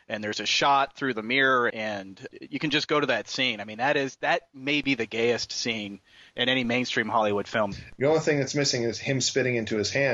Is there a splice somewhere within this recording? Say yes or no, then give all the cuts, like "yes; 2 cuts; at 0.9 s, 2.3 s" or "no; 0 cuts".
yes; 1 cut; at 1.7 s